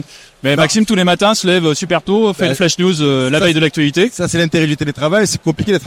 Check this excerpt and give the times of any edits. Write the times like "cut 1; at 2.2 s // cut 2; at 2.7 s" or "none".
none